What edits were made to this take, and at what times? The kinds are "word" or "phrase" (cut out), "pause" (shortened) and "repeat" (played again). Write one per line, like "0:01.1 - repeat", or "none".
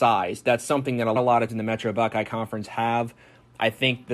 0:01.2 - word
0:01.5 - word

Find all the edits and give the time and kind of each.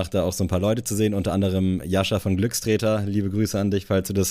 none

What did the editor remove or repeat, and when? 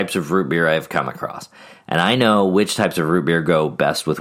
none

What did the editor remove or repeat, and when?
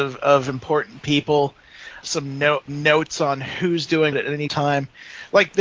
0:02.0 - word
0:02.7 - word
0:04.1 - word
0:04.5 - word

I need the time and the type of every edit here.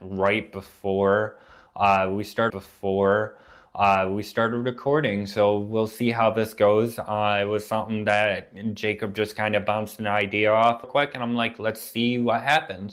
0:02.5 - repeat
0:10.8 - phrase

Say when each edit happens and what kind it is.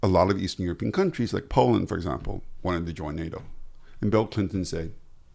none

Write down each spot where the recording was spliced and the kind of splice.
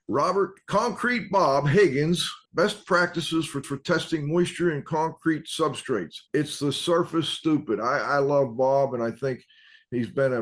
0:02.4 - pause
0:03.6 - repeat
0:06.3 - pause

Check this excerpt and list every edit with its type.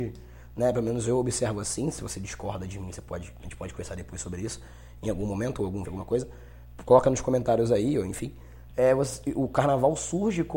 0:05.9 - phrase

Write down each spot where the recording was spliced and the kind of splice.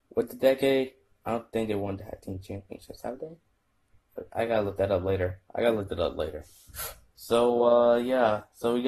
none

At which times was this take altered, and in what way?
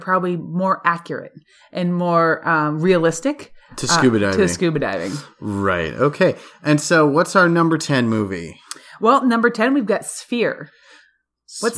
none

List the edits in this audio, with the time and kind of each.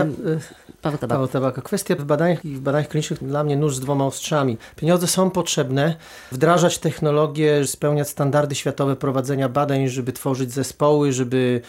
0:02.0 - word
0:02.4 - word
0:03.2 - word
0:06.3 - word
0:07.7 - word

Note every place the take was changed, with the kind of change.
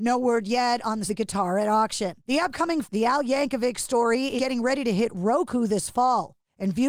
0:01.1 - phrase
0:02.8 - phrase
0:04.4 - word

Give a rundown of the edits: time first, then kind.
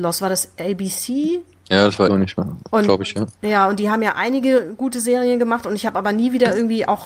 0:02.1 - word

